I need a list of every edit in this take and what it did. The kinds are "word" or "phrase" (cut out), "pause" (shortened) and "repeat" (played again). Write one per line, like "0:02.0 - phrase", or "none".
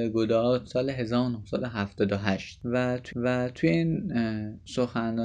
0:03.1 - repeat